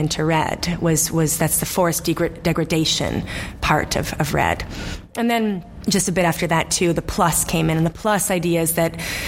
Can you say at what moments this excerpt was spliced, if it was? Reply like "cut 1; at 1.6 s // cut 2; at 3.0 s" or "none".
none